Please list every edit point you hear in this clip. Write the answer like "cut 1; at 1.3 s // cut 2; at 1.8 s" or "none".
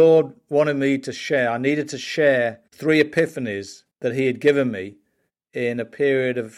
cut 1; at 2.7 s // cut 2; at 3.9 s